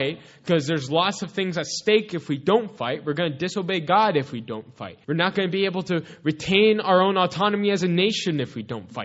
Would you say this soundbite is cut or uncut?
cut